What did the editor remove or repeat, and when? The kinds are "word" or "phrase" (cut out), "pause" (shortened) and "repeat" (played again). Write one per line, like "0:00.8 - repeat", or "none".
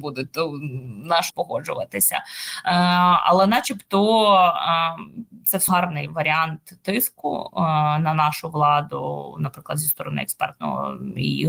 0:01.3 - word
0:05.7 - word